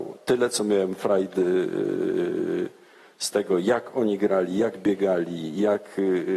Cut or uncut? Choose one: uncut